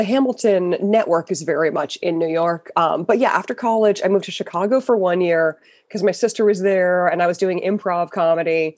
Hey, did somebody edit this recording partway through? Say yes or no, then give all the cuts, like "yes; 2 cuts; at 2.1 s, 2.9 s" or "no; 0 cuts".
no; 0 cuts